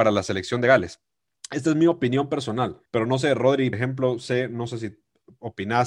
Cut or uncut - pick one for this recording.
cut